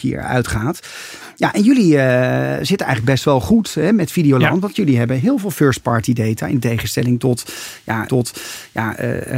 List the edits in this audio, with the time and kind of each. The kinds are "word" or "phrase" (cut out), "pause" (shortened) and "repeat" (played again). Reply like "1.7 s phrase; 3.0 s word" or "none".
8.1 s repeat